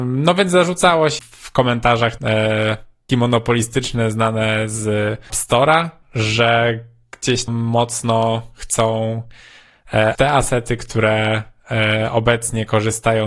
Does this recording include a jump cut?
yes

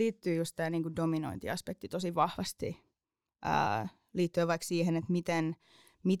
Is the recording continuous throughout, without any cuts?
yes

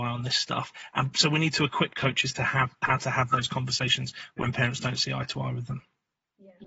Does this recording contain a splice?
no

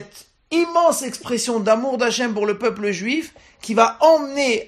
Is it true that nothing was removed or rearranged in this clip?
yes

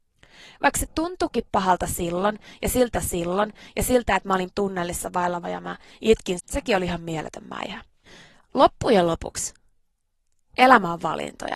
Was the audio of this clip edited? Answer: yes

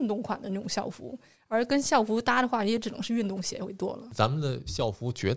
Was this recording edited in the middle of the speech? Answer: no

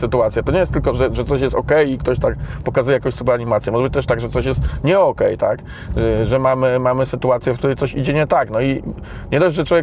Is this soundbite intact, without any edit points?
yes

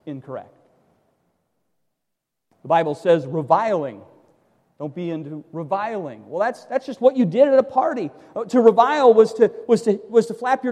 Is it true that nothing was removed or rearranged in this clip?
yes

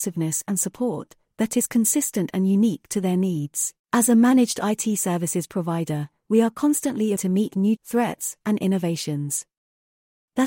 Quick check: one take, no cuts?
no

